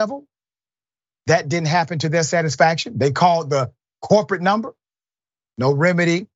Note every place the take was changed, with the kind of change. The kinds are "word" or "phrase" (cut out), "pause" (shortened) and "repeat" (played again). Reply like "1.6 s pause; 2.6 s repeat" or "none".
none